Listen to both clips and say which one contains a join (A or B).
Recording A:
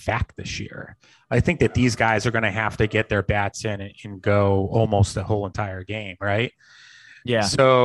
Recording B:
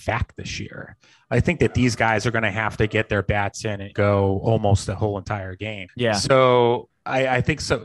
B